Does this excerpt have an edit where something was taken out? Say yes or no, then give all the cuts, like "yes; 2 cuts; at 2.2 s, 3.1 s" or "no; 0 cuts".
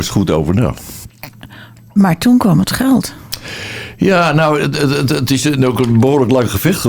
no; 0 cuts